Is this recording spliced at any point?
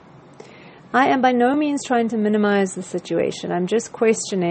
no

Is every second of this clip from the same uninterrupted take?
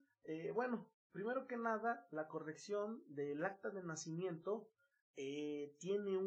yes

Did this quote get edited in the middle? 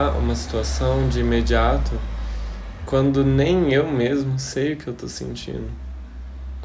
no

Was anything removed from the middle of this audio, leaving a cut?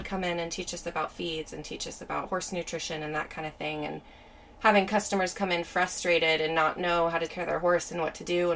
yes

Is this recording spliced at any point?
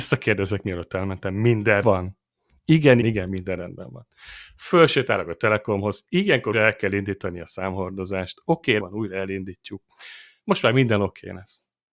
yes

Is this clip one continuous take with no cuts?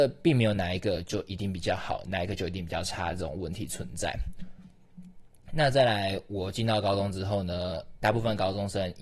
no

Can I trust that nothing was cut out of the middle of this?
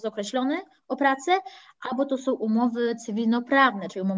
yes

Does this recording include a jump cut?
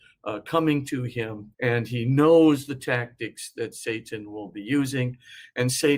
yes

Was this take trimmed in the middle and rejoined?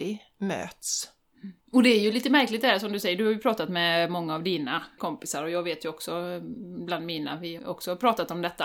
yes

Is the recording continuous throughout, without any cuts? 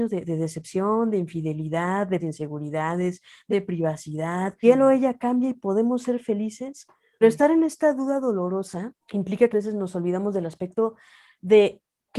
no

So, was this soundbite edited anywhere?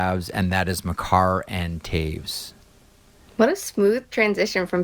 no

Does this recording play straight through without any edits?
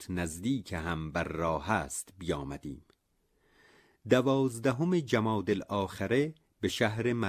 yes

